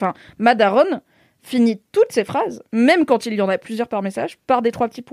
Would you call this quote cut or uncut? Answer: uncut